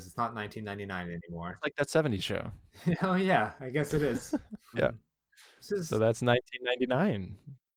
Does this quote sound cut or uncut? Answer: cut